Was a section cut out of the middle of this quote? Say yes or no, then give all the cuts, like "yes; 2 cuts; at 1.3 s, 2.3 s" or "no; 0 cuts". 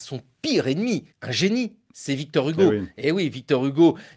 yes; 1 cut; at 1.1 s